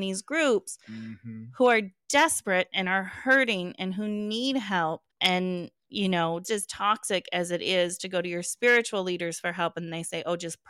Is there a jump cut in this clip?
yes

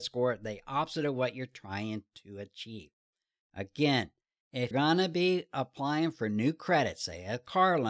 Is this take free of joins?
no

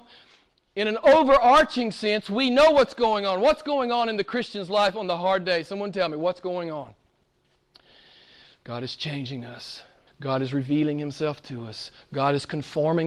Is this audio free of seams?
no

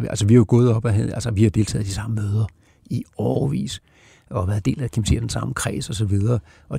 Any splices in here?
no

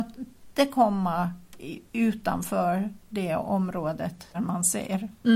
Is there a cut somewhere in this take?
yes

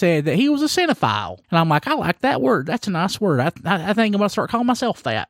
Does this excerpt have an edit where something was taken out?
yes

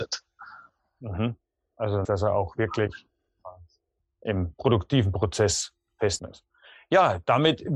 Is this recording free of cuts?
no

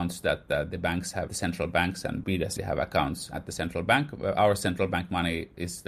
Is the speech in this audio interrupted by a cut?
yes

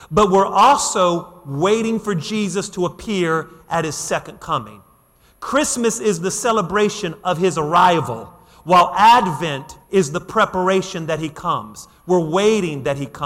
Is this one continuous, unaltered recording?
no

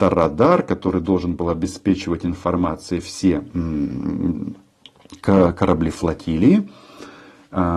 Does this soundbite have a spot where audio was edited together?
no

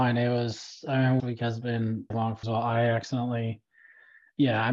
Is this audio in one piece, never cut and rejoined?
no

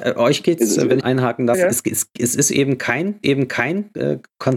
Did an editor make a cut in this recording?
yes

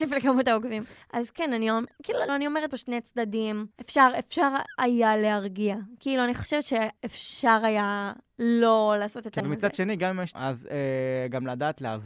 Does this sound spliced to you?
yes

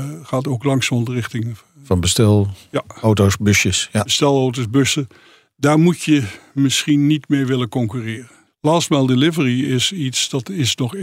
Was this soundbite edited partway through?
no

